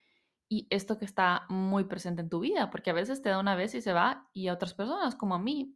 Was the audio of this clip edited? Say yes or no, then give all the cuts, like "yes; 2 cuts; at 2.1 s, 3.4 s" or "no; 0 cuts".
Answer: no; 0 cuts